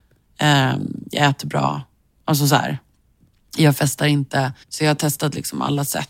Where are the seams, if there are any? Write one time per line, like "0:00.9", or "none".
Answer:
0:04.6